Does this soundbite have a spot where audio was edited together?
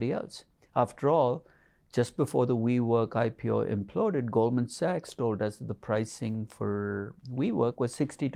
no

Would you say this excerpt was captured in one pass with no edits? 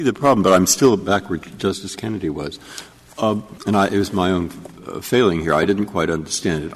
no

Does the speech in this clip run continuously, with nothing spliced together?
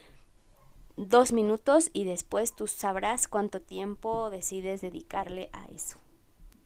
yes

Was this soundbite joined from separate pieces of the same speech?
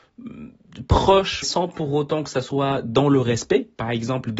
yes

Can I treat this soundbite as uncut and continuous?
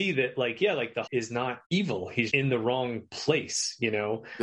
no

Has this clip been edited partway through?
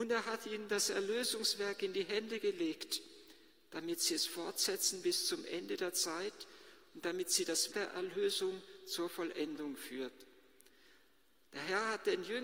yes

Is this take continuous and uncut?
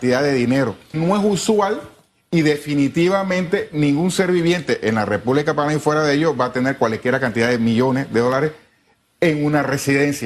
no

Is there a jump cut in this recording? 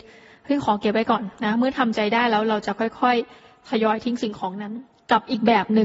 yes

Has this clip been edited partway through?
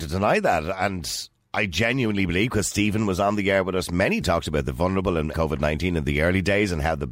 yes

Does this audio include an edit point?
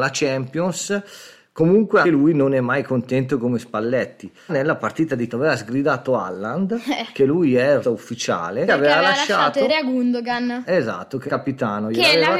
yes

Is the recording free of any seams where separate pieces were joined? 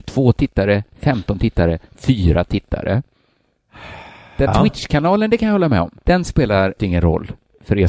no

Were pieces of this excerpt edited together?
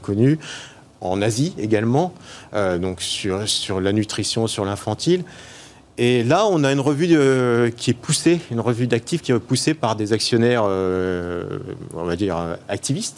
no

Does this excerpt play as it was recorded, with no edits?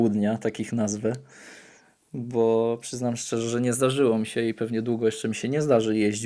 yes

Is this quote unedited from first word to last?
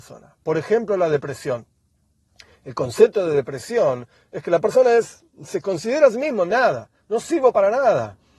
yes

